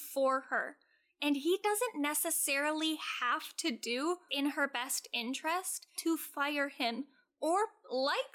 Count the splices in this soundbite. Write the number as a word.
two